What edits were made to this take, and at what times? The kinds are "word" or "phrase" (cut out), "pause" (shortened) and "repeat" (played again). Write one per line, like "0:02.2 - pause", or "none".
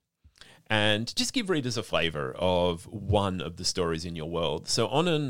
none